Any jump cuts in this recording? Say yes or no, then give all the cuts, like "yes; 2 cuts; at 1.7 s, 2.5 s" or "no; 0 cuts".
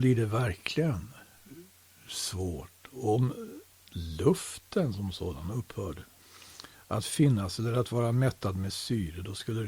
no; 0 cuts